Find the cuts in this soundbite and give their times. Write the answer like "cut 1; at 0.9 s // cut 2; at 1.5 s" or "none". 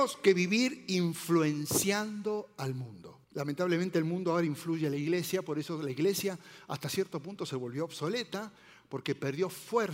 cut 1; at 3.2 s

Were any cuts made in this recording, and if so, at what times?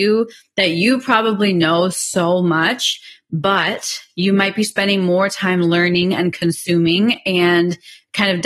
none

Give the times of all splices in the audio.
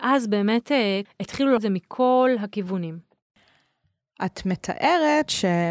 cut 1; at 1.0 s // cut 2; at 1.6 s

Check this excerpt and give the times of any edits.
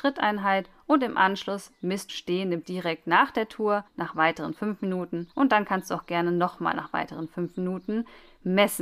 cut 1; at 2.1 s // cut 2; at 2.6 s // cut 3; at 3.9 s // cut 4; at 5.3 s

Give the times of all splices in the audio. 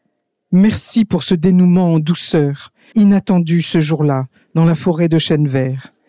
cut 1; at 2.9 s

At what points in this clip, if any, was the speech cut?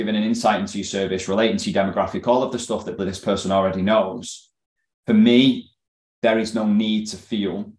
cut 1; at 3.0 s

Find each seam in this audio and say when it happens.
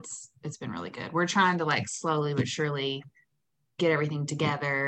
none

